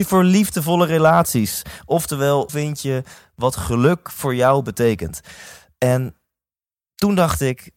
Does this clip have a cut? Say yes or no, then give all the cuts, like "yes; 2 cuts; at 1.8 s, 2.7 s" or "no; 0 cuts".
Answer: yes; 1 cut; at 2.5 s